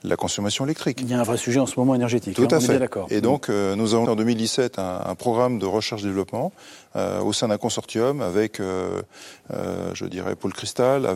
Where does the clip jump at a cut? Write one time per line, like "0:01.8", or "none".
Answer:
0:04.1